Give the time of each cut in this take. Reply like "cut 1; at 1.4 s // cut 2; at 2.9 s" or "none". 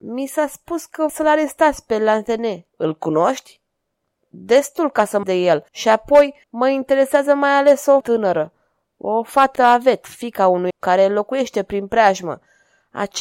cut 1; at 1.1 s // cut 2; at 2.7 s // cut 3; at 5.2 s // cut 4; at 5.7 s // cut 5; at 6.4 s // cut 6; at 8.0 s // cut 7; at 9.6 s // cut 8; at 10.7 s